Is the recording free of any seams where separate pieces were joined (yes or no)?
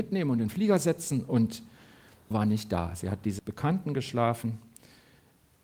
no